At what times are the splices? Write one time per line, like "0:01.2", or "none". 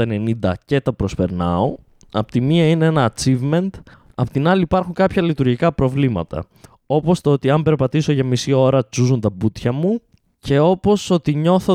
none